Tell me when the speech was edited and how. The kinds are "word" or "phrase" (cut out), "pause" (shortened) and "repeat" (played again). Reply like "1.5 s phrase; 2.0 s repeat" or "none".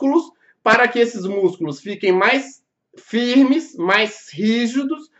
none